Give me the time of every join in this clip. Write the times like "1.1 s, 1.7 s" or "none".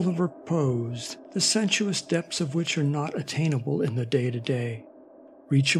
none